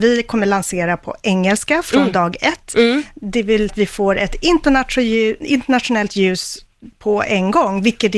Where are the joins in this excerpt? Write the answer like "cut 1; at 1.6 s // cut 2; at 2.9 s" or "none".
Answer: cut 1; at 3.7 s